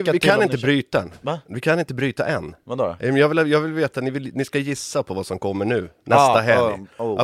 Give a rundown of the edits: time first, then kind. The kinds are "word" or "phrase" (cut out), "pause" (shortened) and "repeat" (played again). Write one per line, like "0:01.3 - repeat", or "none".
none